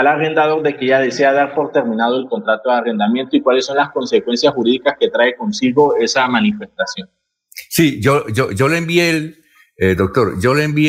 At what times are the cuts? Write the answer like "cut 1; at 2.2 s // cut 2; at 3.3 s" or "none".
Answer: none